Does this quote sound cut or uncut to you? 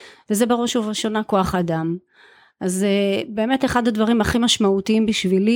uncut